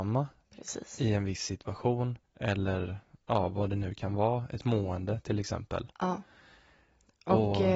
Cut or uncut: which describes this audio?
cut